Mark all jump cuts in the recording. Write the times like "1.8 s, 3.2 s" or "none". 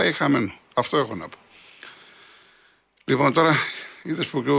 none

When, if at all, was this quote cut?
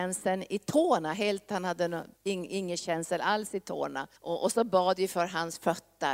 2.2 s, 4.1 s

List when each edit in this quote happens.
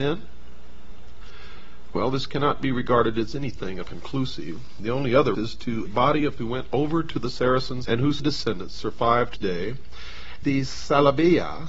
3.8 s, 5.3 s, 5.9 s, 6.4 s, 7.8 s, 8.2 s, 9.4 s, 10.4 s

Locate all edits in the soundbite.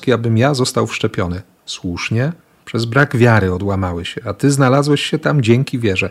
none

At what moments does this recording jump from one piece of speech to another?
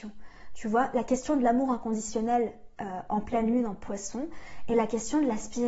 none

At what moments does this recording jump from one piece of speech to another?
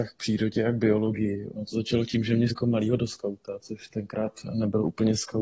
2.5 s

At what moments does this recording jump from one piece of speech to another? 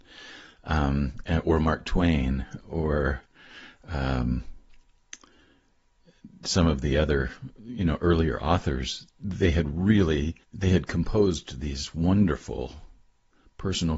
10.4 s

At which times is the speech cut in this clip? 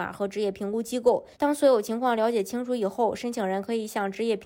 1.3 s

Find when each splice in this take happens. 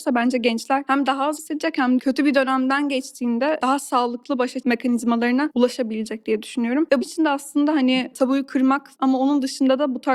1.4 s, 2.0 s, 4.6 s, 7.0 s, 8.1 s, 8.9 s

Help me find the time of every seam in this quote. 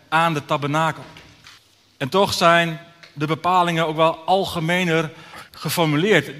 1.6 s, 5.5 s

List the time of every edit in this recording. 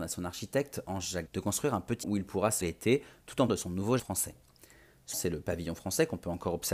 1.3 s, 2.0 s, 2.6 s, 3.5 s, 4.0 s, 5.1 s

